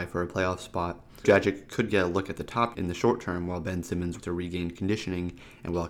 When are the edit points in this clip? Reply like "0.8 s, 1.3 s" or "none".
1.2 s, 2.7 s, 4.2 s

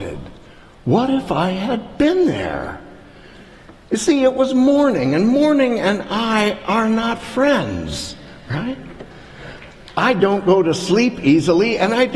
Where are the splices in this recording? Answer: none

